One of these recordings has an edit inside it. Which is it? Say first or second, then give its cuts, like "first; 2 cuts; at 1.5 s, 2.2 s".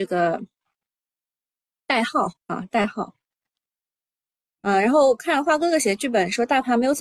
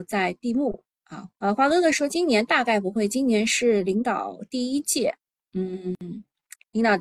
second; 1 cut; at 1.3 s